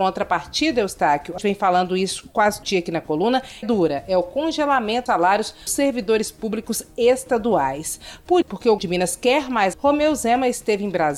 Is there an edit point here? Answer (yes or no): yes